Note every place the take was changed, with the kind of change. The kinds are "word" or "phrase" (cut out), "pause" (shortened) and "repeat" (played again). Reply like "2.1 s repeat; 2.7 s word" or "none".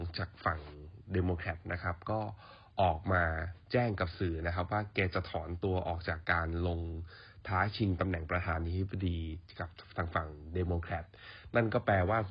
3.6 s pause

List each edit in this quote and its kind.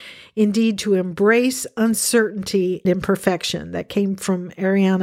2.8 s word

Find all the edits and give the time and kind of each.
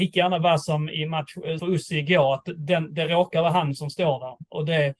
1.6 s word

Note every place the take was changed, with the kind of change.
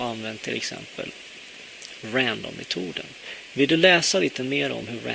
none

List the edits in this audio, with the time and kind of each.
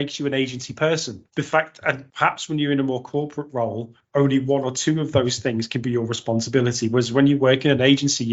1.3 s pause; 2.1 s pause

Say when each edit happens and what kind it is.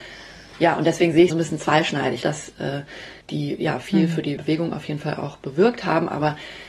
1.3 s phrase; 2.2 s word; 3.2 s pause; 4.4 s word

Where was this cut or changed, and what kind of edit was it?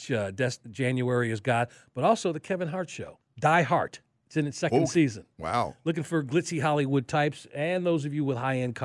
3.2 s pause

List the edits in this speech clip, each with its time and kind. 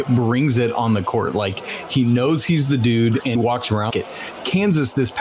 3.3 s word; 3.9 s word

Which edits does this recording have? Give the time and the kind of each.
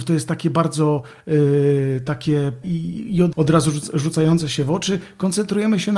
2.6 s word; 3.3 s word

